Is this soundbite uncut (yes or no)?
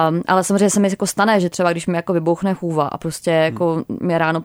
yes